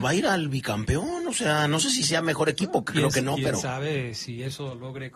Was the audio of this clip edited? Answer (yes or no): no